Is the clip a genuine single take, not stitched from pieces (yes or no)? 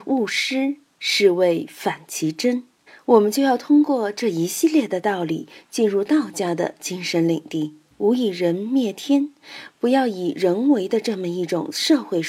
no